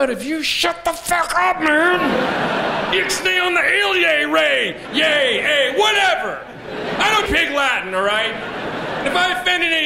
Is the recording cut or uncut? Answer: cut